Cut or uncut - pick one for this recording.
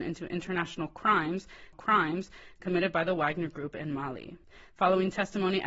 cut